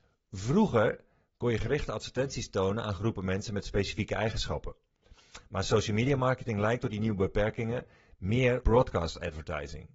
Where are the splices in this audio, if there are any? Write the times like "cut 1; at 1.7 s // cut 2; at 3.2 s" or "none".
cut 1; at 8.6 s